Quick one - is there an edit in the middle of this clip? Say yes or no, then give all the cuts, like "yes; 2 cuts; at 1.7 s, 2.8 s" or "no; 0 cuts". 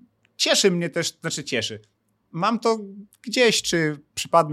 no; 0 cuts